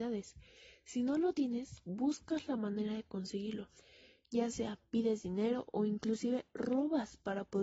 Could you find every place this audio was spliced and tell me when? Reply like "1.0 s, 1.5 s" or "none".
none